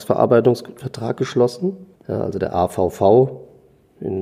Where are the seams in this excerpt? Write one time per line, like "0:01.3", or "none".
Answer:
0:01.9